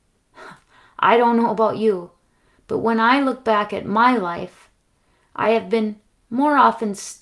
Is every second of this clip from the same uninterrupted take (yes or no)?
yes